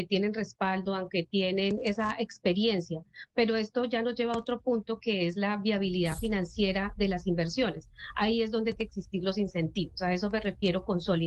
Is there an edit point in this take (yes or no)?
yes